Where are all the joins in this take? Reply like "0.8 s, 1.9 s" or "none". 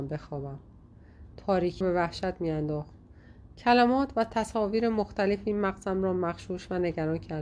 1.8 s